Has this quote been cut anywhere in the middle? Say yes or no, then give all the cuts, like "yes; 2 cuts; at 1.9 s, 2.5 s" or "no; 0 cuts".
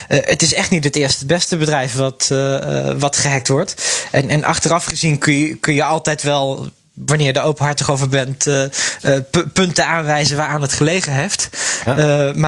no; 0 cuts